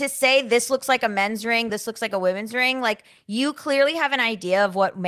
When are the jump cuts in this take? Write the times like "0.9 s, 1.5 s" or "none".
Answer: none